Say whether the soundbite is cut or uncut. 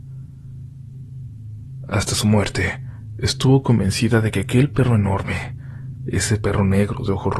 uncut